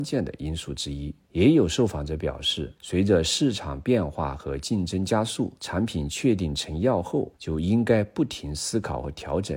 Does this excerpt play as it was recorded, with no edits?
no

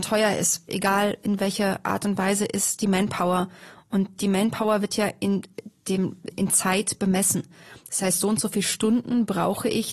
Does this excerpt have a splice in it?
yes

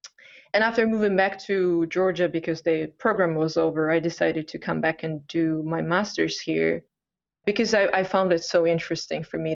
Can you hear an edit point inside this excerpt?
no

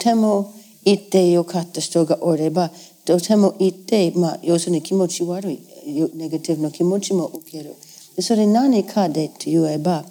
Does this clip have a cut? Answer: yes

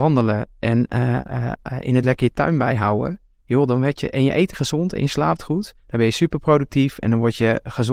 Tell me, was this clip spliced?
yes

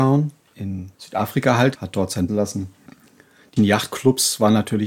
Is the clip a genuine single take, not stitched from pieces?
no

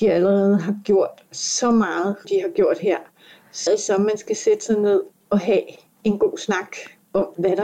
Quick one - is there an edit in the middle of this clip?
yes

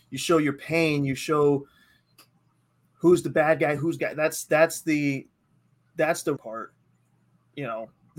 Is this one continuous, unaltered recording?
no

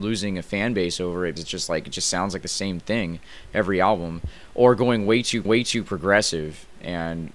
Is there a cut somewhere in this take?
yes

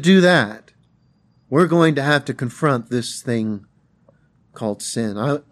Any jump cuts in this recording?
no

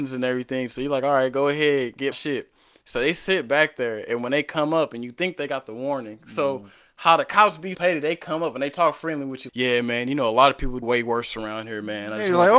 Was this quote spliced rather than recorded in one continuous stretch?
yes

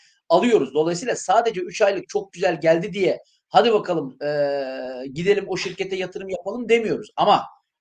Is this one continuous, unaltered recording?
yes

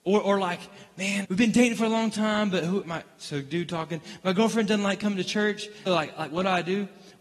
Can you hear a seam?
yes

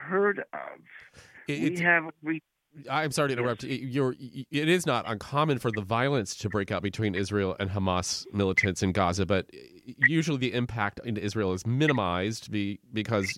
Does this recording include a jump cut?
no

